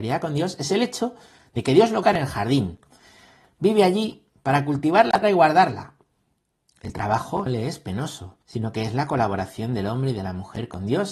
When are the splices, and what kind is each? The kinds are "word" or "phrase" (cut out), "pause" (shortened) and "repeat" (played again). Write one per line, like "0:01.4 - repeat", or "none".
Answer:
0:02.0 - word
0:05.2 - word
0:07.5 - word
0:08.4 - pause